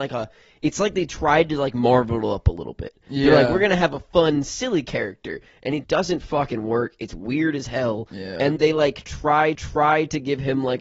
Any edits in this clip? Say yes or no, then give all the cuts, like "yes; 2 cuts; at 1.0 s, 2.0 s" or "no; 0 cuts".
yes; 3 cuts; at 5.8 s, 8.6 s, 9.5 s